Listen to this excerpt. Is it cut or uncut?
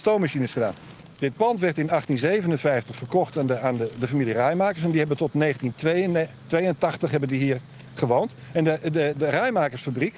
uncut